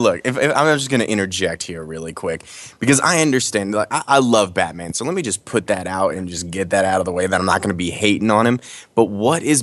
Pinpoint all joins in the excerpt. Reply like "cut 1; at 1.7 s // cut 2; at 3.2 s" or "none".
none